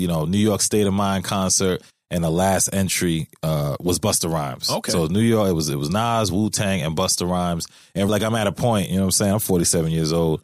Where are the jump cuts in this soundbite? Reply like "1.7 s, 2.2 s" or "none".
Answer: 8.1 s